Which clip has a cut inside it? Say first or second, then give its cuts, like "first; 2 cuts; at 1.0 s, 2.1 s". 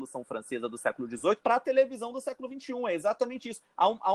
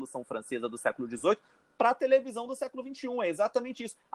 first; 1 cut; at 1.4 s